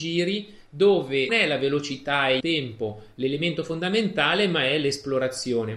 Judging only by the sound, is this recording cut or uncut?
cut